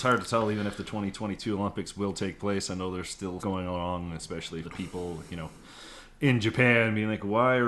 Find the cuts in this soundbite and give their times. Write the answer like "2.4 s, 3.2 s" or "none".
3.4 s, 4.6 s